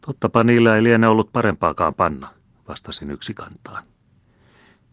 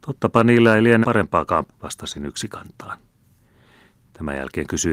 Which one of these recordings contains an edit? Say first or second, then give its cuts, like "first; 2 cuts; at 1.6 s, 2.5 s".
second; 2 cuts; at 1.0 s, 1.7 s